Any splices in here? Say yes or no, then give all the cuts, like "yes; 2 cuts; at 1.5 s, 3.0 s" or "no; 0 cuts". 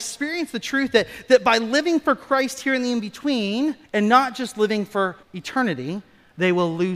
yes; 2 cuts; at 3.8 s, 5.2 s